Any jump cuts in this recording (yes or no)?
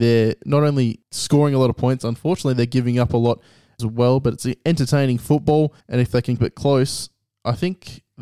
yes